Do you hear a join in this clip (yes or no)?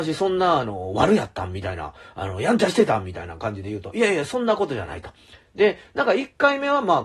no